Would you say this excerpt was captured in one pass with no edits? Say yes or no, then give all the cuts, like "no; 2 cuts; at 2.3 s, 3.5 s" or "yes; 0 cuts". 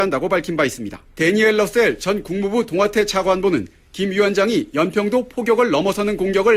no; 1 cut; at 1.1 s